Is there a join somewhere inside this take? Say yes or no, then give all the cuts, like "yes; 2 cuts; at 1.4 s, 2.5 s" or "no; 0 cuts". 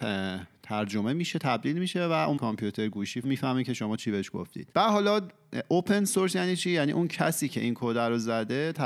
yes; 3 cuts; at 2.4 s, 3.2 s, 4.7 s